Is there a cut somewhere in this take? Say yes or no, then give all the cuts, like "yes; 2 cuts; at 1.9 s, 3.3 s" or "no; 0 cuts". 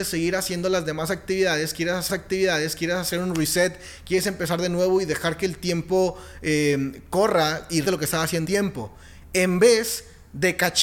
yes; 3 cuts; at 2.1 s, 7.8 s, 8.4 s